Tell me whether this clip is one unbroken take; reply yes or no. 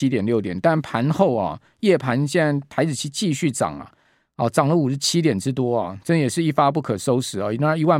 yes